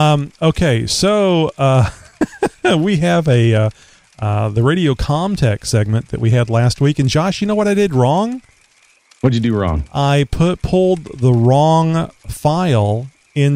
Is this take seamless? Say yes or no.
yes